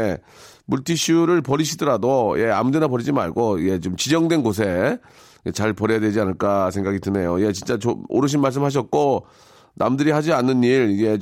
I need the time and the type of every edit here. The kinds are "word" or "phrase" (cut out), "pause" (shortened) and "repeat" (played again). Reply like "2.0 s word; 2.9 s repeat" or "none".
none

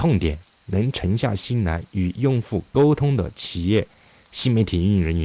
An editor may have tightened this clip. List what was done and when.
none

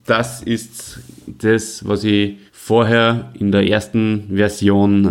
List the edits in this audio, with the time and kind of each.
2.5 s pause

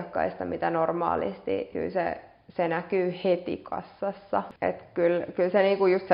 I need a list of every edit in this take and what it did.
1.7 s word; 4.6 s pause

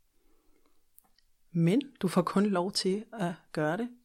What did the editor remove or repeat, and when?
none

